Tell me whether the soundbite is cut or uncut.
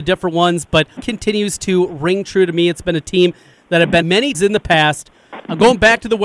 cut